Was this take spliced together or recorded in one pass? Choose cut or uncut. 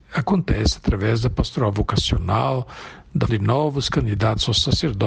cut